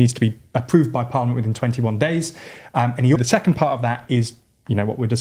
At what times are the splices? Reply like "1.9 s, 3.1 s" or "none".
3.2 s